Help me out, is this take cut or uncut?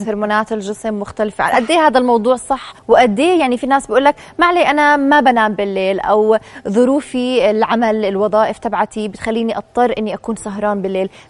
cut